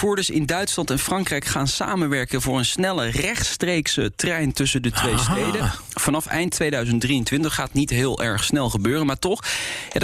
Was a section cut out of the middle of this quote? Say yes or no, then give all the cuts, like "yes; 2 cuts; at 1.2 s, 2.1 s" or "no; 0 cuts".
no; 0 cuts